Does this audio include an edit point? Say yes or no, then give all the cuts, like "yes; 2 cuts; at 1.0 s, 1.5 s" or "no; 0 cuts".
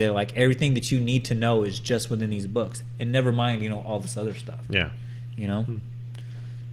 no; 0 cuts